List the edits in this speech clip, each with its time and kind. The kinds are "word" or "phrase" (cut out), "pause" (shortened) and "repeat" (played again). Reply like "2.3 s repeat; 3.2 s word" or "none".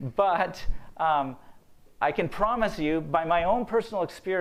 none